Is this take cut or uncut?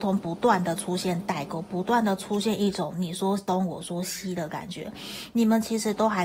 uncut